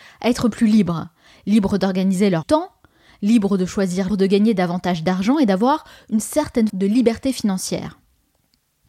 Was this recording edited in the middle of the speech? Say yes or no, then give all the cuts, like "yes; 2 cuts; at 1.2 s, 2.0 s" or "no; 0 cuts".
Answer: yes; 3 cuts; at 2.4 s, 4.1 s, 6.7 s